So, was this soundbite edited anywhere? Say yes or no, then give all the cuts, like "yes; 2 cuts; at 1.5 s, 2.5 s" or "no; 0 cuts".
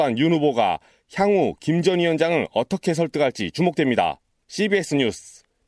no; 0 cuts